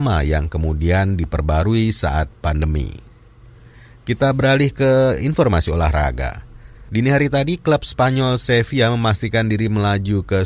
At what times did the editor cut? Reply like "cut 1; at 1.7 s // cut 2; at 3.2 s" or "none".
none